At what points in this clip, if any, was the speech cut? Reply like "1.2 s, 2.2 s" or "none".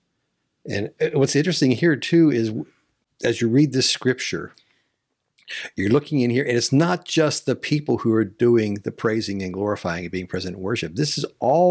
none